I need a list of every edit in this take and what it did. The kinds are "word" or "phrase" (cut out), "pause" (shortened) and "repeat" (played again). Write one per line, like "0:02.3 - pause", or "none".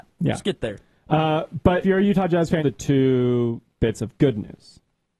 0:01.8 - word
0:02.6 - word